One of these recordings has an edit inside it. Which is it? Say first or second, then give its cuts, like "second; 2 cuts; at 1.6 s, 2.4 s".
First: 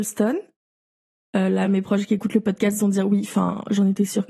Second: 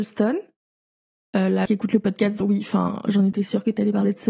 second; 2 cuts; at 1.7 s, 2.4 s